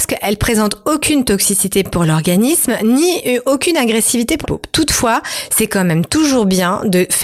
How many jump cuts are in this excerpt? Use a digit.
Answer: 1